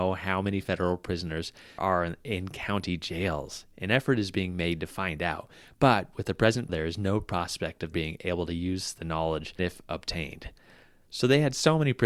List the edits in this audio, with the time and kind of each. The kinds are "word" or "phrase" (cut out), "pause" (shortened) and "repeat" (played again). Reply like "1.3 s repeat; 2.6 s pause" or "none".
1.8 s word; 6.7 s word; 7.9 s word; 9.6 s word